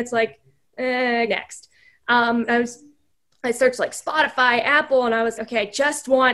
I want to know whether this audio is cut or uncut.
cut